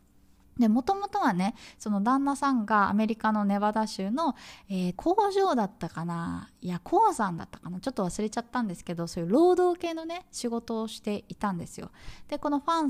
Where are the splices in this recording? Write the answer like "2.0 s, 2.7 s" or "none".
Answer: 5.0 s